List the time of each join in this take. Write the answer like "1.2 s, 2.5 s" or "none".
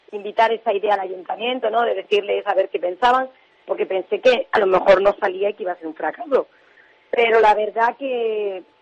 none